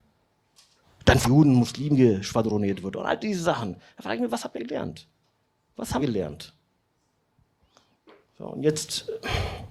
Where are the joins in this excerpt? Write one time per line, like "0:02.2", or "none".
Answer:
0:01.2
0:04.5
0:06.0